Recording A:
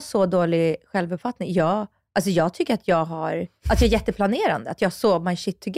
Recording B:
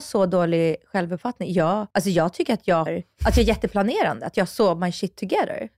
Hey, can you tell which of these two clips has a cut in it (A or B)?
B